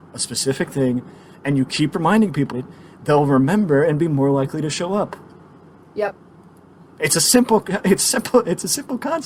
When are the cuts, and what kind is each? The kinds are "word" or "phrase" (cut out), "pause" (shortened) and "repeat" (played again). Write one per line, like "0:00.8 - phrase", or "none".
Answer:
0:02.5 - word